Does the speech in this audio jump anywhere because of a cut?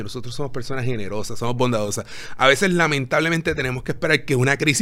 no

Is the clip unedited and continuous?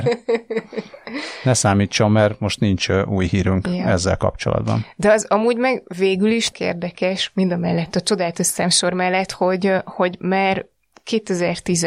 no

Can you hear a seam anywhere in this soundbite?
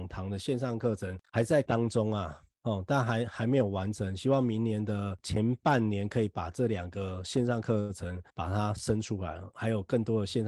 yes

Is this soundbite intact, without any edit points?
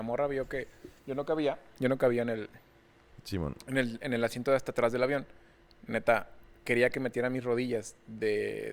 no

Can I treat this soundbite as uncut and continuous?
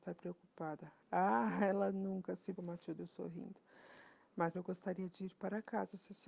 no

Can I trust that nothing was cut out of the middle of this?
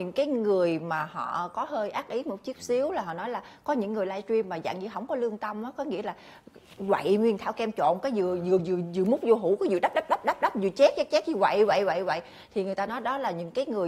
yes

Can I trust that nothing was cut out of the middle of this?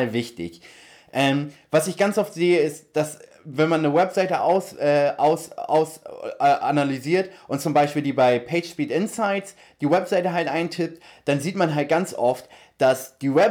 yes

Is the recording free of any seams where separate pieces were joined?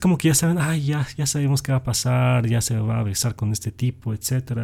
yes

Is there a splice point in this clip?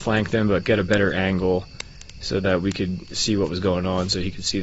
no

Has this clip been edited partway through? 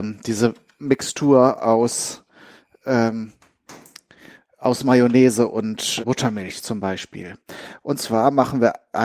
yes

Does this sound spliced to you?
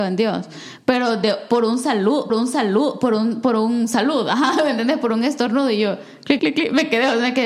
yes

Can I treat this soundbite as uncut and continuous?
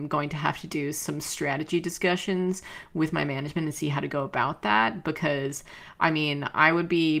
yes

